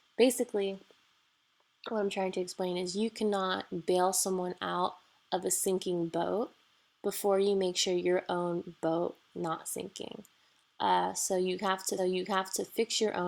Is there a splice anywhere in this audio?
yes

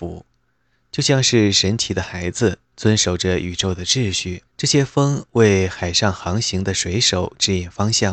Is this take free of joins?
no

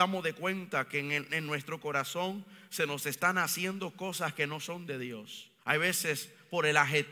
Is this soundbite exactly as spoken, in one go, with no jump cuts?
no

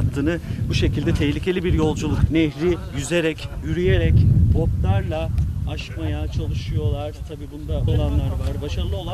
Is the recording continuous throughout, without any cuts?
no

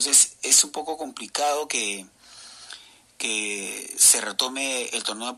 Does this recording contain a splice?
no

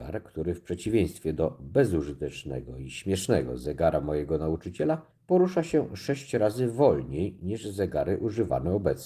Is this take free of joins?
no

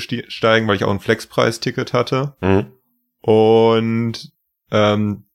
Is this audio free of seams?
yes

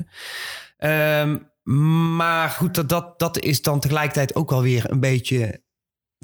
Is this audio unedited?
no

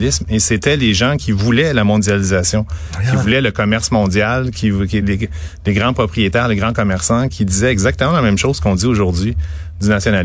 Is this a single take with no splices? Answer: yes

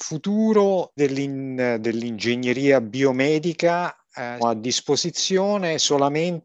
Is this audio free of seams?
no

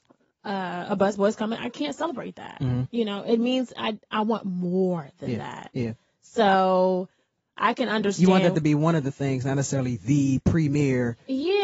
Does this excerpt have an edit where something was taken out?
no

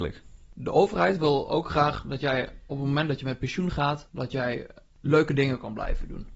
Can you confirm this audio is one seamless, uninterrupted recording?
yes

